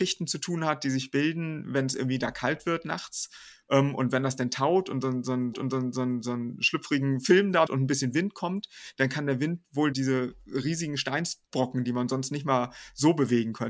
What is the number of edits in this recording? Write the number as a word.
four